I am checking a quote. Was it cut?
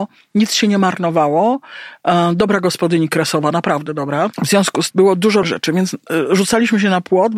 yes; 3 cuts; at 4.3 s, 4.9 s, 5.4 s

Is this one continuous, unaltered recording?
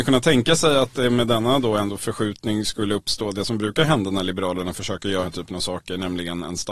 no; 1 cut; at 5.2 s

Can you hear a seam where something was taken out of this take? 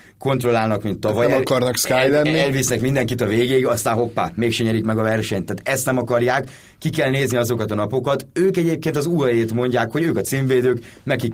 no; 0 cuts

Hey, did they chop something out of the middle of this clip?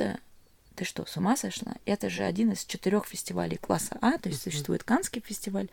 no; 0 cuts

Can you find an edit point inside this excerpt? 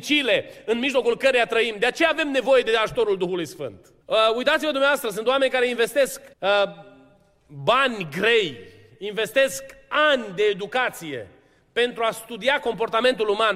yes; 2 cuts; at 4.0 s, 6.3 s

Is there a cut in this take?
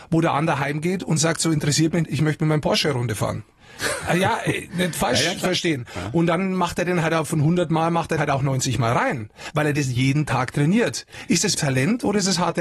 yes; 3 cuts; at 2.0 s, 8.2 s, 11.5 s

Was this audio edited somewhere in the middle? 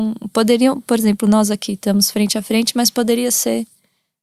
no; 0 cuts

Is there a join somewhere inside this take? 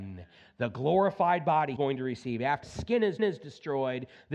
yes; 3 cuts; at 1.8 s, 2.6 s, 3.2 s

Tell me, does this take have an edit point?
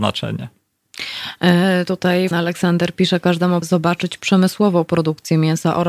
yes; 2 cuts; at 2.3 s, 3.6 s

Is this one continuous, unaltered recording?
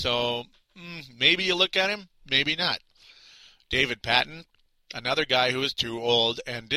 yes; 0 cuts

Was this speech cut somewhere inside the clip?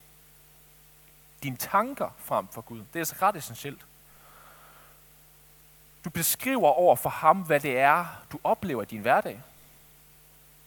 no; 0 cuts

